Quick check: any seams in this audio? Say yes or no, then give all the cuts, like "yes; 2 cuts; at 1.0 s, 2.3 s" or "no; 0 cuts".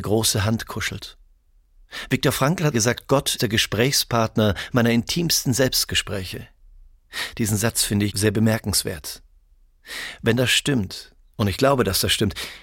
yes; 3 cuts; at 2.7 s, 3.4 s, 8.1 s